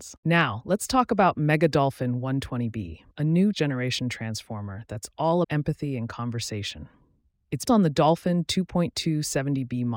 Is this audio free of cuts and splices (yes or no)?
no